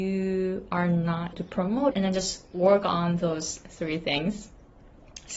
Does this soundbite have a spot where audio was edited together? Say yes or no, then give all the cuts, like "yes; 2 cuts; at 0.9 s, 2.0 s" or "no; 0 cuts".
yes; 2 cuts; at 1.3 s, 1.9 s